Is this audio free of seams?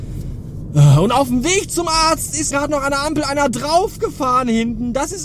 no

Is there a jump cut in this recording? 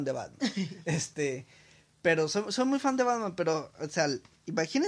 no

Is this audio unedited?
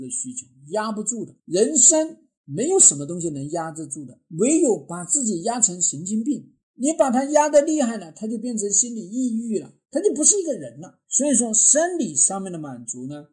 no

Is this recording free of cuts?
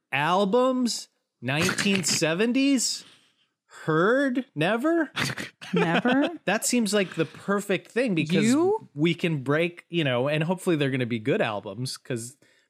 yes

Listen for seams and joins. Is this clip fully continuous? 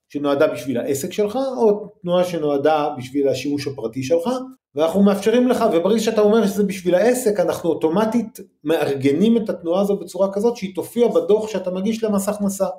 no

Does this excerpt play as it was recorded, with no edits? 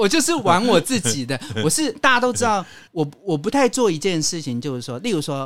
no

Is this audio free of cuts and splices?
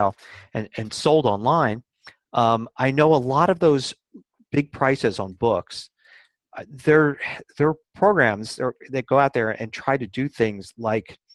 yes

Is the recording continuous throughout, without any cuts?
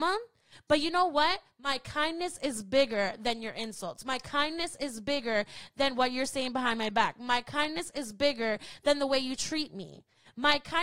yes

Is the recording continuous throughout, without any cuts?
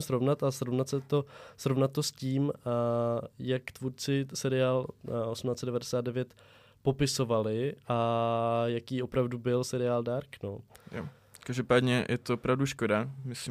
yes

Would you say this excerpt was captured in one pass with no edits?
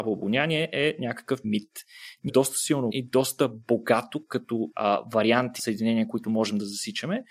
no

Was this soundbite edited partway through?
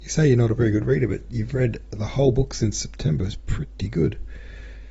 no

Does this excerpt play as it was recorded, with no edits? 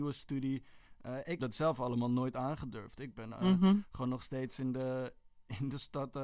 no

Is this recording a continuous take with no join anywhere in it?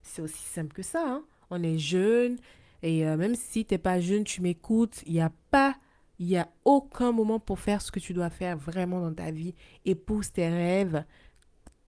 yes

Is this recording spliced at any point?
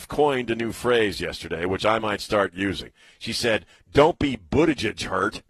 no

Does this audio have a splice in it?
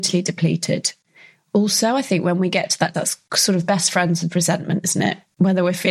yes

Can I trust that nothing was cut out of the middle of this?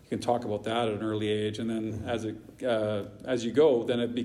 yes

